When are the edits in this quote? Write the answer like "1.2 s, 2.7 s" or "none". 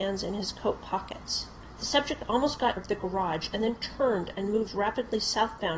2.8 s